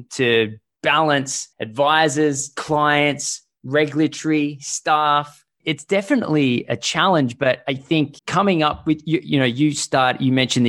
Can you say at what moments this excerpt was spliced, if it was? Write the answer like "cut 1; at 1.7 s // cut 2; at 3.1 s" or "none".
cut 1; at 1.5 s // cut 2; at 8.2 s